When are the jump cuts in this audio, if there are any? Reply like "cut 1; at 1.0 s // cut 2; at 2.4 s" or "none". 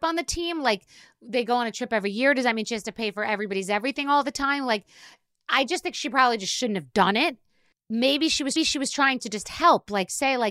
cut 1; at 8.6 s